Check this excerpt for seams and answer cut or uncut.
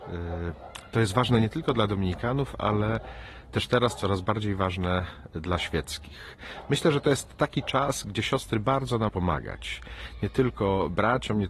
cut